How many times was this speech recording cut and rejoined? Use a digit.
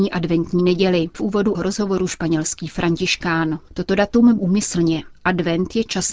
4